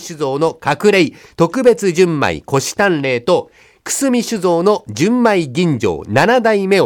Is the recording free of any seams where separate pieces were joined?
yes; 0 cuts

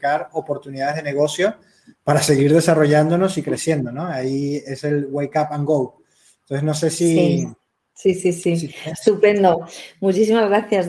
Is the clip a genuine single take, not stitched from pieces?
yes; 0 cuts

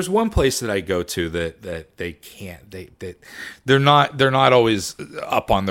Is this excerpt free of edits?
yes; 0 cuts

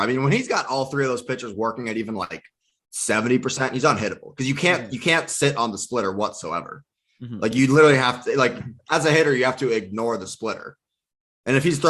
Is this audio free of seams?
yes; 0 cuts

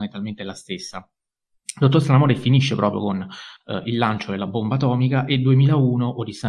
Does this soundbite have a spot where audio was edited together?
no; 0 cuts

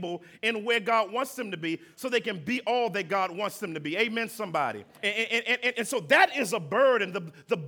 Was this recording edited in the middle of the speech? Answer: yes; 2 cuts; at 4.9 s, 5.7 s

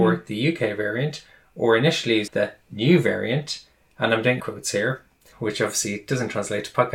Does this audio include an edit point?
yes; 3 cuts; at 2.3 s, 4.4 s, 5.3 s

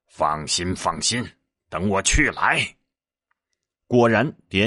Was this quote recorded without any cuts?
yes; 0 cuts

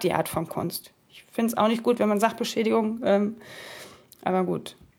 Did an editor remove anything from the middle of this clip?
no; 0 cuts

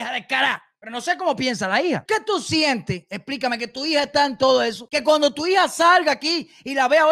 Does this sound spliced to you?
no; 0 cuts

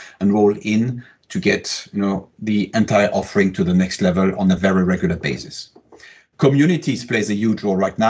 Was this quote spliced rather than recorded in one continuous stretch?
no; 0 cuts

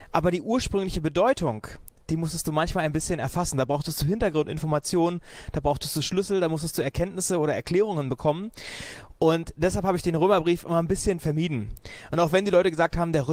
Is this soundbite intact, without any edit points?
yes; 0 cuts

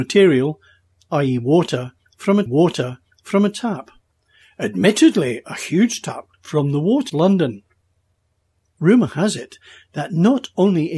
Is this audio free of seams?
no; 3 cuts; at 2.5 s, 6.3 s, 7.1 s

